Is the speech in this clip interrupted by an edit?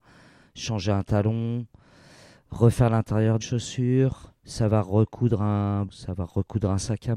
yes; 3 cuts; at 3.4 s, 4.4 s, 5.9 s

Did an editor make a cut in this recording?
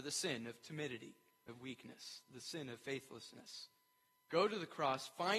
yes; 1 cut; at 1.5 s

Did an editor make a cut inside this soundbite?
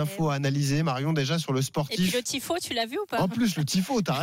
no; 0 cuts

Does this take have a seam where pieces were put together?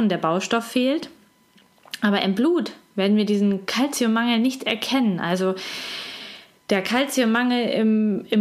no; 0 cuts

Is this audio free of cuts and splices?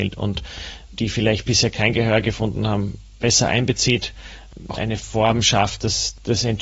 no; 2 cuts; at 1.0 s, 4.8 s

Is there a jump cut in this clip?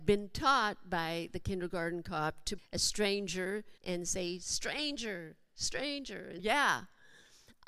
yes; 3 cuts; at 2.6 s, 3.8 s, 6.4 s

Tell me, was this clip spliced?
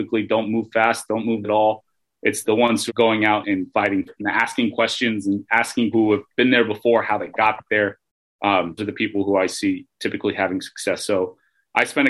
yes; 7 cuts; at 1.4 s, 2.4 s, 2.9 s, 3.4 s, 4.1 s, 5.9 s, 8.8 s

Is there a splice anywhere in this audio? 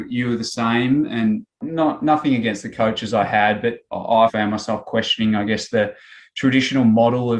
yes; 1 cut; at 4.3 s

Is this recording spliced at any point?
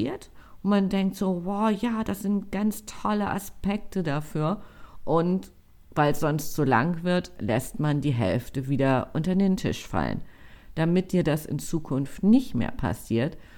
no; 0 cuts

